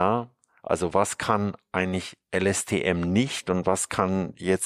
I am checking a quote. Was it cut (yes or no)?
no